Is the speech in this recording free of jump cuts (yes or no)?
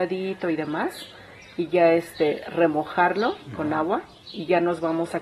yes